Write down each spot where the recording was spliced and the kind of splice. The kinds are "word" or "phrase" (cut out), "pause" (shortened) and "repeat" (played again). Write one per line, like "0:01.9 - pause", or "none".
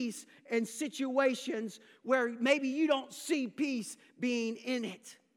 none